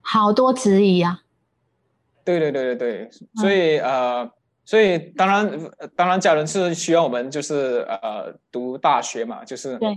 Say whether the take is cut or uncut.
cut